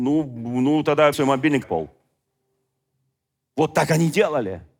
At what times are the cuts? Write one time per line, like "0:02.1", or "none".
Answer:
0:01.1
0:01.6